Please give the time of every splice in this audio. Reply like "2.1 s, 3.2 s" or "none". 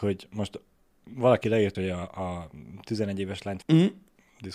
1.7 s, 3.6 s